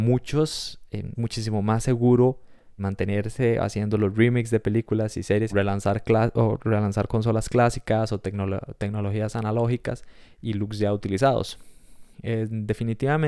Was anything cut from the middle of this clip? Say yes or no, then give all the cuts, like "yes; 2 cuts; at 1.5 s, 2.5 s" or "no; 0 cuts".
yes; 4 cuts; at 1.1 s, 2.8 s, 5.5 s, 12.1 s